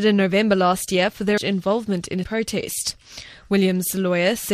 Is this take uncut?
no; 2 cuts; at 1.4 s, 2.2 s

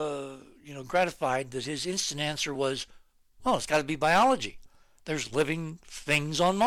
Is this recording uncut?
yes; 0 cuts

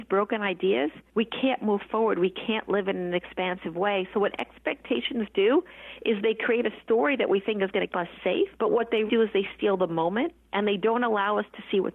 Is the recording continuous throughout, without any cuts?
no; 3 cuts; at 7.9 s, 8.5 s, 9.1 s

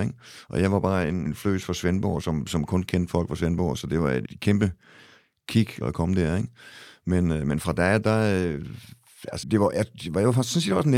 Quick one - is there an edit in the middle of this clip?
yes; 4 cuts; at 1.3 s, 4.3 s, 5.8 s, 9.4 s

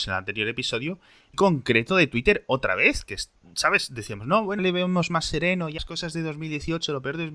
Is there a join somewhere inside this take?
yes; 3 cuts; at 1.3 s, 4.6 s, 5.8 s

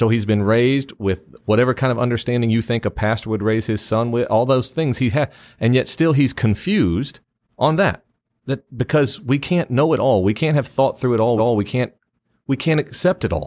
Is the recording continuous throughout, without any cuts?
no; 1 cut; at 11.4 s

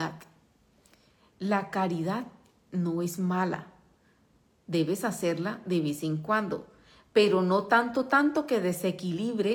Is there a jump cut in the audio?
no; 0 cuts

